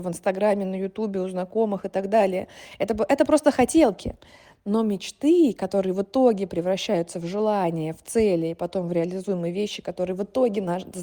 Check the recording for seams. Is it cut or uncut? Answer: uncut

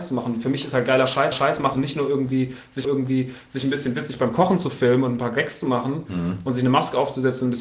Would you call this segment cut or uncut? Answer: cut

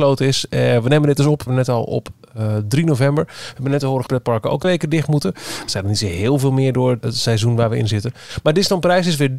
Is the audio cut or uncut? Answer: cut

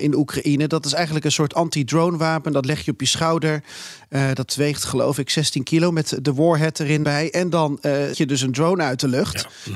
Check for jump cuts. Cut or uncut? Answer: cut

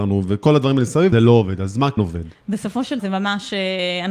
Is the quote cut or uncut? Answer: cut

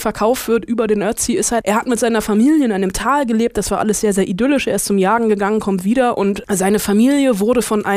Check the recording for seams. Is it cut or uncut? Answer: cut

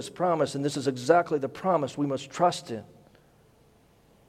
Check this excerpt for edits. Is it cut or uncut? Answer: uncut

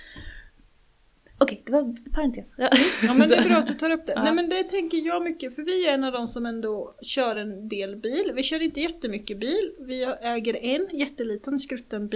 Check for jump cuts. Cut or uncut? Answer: uncut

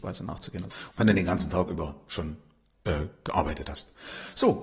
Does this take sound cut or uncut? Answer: uncut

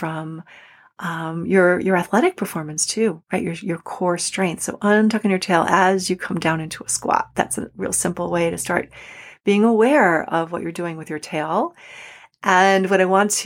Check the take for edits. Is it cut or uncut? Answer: uncut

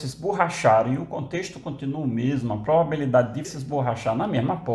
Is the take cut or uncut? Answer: cut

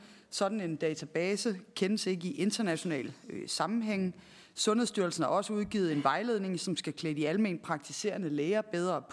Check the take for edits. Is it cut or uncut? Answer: uncut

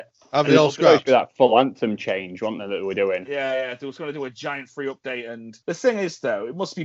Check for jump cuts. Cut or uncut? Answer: cut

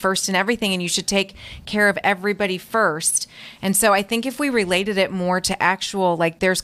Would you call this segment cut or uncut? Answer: uncut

